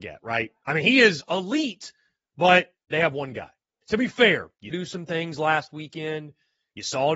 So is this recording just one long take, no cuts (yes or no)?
no